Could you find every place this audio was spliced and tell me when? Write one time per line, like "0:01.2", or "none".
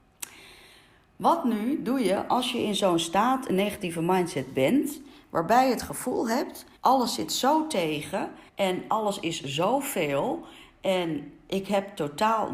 0:06.8
0:08.5

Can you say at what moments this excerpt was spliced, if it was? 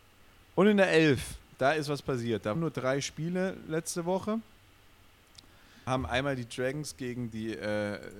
0:02.5
0:05.9

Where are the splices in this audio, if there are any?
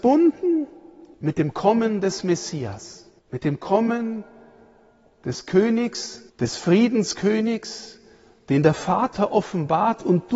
0:01.1
0:03.2
0:06.3

